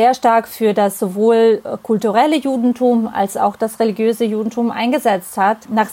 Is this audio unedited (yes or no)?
yes